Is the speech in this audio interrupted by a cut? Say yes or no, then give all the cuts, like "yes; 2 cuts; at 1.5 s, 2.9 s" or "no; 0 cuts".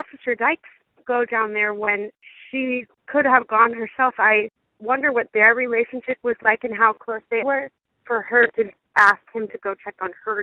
yes; 1 cut; at 7.4 s